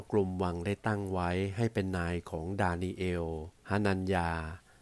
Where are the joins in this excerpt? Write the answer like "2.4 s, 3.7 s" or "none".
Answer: 3.6 s